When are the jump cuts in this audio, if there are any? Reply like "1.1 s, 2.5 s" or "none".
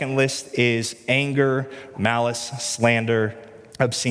1.9 s